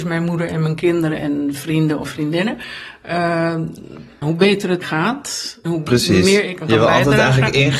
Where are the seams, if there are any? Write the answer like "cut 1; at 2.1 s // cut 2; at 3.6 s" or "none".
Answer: cut 1; at 1.2 s // cut 2; at 4.2 s // cut 3; at 4.8 s // cut 4; at 5.7 s // cut 5; at 6.6 s